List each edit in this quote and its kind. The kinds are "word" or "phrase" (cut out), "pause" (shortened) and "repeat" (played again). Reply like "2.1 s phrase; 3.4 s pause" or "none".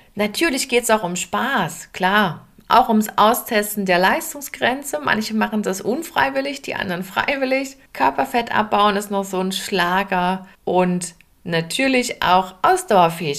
2.5 s pause; 7.9 s pause; 10.5 s pause